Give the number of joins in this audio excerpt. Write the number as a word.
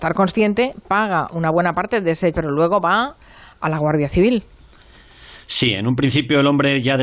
one